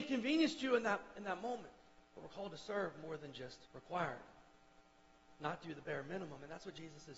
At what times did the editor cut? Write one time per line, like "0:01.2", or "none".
0:01.9
0:03.7